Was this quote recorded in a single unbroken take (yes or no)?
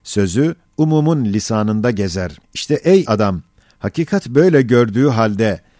no